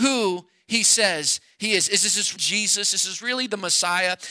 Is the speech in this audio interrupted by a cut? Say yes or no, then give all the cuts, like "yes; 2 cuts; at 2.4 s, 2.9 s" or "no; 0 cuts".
yes; 1 cut; at 2.4 s